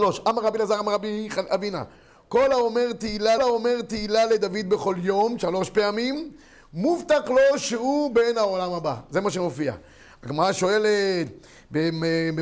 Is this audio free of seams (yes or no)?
no